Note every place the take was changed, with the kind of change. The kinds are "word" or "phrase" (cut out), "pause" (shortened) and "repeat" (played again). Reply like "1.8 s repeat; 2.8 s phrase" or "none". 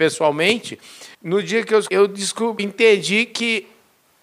1.1 s pause; 1.9 s word; 2.6 s word